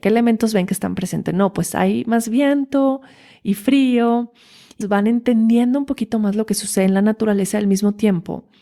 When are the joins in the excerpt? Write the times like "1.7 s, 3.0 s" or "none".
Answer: 4.8 s